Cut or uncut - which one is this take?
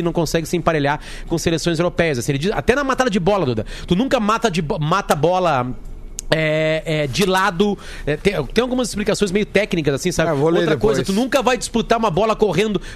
uncut